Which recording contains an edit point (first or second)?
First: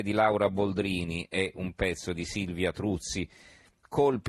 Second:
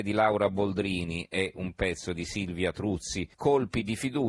second